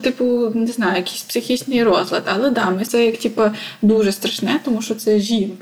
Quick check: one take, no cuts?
no; 1 cut; at 2.9 s

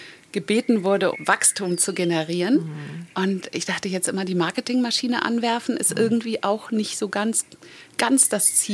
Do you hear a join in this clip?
yes; 1 cut; at 1.1 s

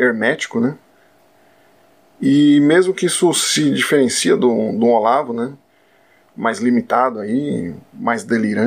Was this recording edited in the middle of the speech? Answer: no; 0 cuts

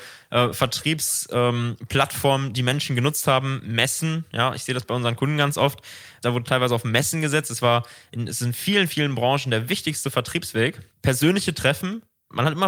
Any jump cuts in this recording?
yes; 1 cut; at 10.9 s

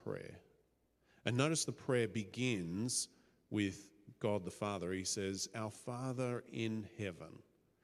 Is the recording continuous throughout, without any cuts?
yes; 0 cuts

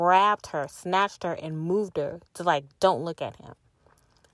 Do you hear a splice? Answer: yes; 1 cut; at 2.3 s

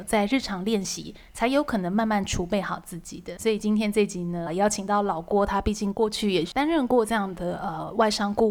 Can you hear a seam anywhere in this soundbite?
yes; 1 cut; at 4.5 s

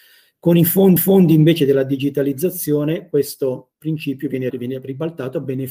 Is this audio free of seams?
no; 3 cuts; at 1.0 s, 3.7 s, 4.5 s

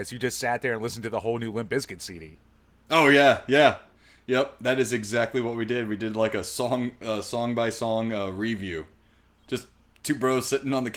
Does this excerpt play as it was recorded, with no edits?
yes; 0 cuts

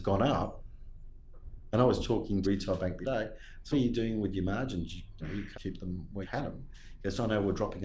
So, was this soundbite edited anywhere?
yes; 6 cuts; at 2.4 s, 3.0 s, 3.7 s, 5.2 s, 5.5 s, 6.2 s

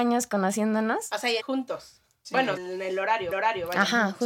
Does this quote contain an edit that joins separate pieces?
yes; 3 cuts; at 1.4 s, 2.6 s, 3.3 s

